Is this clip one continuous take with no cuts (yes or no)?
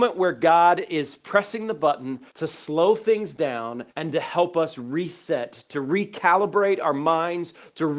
no